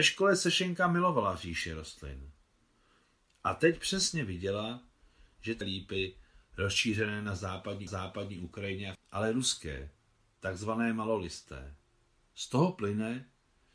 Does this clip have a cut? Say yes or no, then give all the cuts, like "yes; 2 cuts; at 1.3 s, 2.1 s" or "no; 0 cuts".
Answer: yes; 3 cuts; at 5.6 s, 7.9 s, 8.9 s